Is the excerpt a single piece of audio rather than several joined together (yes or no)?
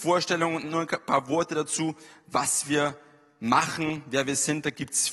yes